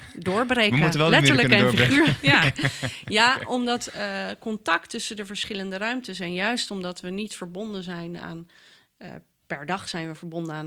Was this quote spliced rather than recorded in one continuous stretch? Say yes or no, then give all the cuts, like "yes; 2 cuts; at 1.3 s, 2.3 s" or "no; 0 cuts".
no; 0 cuts